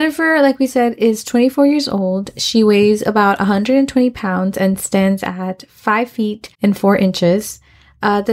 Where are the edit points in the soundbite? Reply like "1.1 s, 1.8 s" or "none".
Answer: 6.5 s

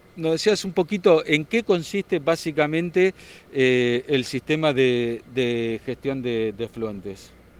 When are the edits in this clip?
none

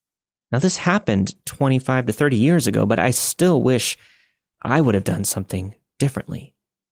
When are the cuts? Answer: none

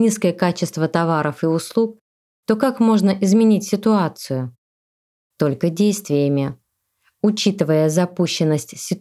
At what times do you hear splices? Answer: none

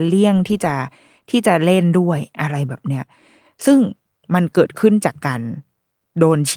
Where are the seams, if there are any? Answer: none

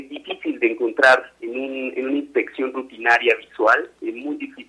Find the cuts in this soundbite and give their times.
1.4 s

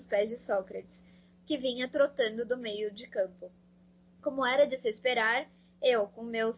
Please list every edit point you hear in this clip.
none

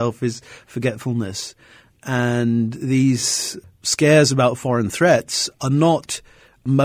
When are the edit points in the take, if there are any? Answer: none

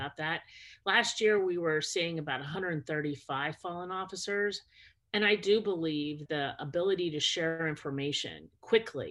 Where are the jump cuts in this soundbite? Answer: 6.3 s

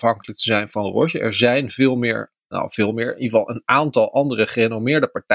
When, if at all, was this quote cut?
none

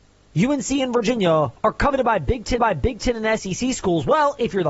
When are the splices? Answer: 1.6 s, 2.6 s

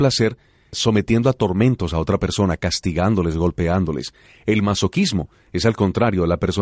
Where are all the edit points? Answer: none

